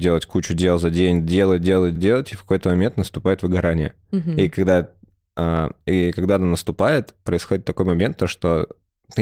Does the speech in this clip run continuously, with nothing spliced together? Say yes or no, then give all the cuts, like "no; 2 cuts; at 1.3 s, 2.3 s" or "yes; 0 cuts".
no; 1 cut; at 2.0 s